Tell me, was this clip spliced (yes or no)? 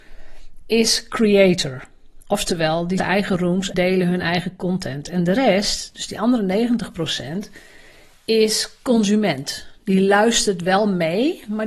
yes